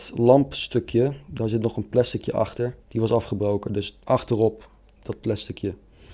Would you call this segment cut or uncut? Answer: cut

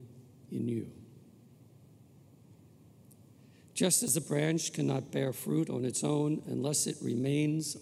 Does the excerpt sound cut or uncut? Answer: uncut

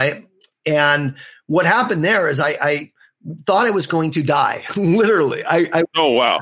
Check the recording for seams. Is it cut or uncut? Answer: uncut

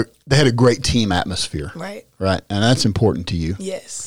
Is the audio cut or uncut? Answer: uncut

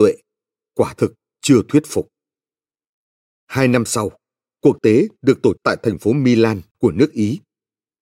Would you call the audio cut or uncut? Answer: cut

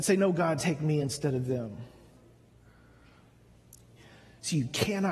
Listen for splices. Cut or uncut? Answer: uncut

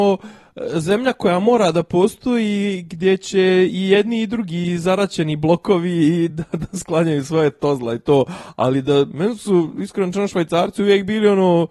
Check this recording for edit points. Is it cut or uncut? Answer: uncut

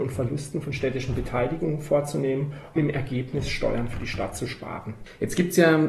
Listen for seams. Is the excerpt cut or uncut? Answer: cut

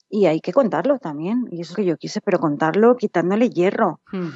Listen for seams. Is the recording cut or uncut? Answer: cut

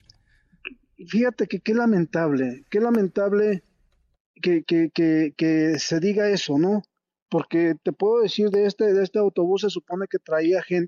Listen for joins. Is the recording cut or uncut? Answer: uncut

